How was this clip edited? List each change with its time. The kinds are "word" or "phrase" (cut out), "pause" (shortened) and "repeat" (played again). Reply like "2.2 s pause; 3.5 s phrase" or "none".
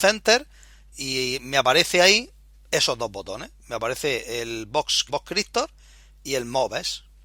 0.9 s word; 5.1 s word